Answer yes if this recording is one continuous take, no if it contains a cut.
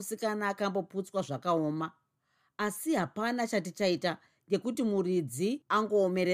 yes